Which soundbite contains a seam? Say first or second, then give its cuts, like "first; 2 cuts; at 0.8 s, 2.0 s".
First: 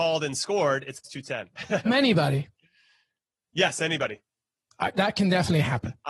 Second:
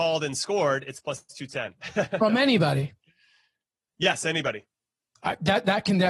first; 3 cuts; at 1.0 s, 1.9 s, 4.9 s